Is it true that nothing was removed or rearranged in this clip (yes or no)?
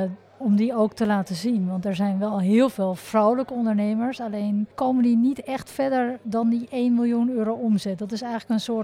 no